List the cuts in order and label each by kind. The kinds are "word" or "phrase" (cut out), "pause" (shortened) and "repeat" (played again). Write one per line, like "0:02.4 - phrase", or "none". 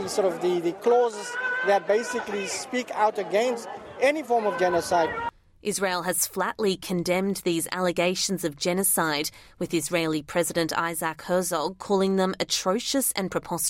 none